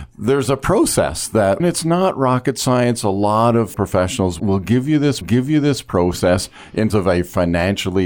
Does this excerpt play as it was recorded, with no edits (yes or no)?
no